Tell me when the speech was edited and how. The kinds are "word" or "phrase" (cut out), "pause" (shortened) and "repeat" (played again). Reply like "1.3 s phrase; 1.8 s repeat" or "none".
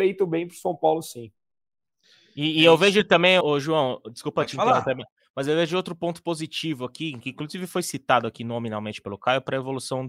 3.4 s word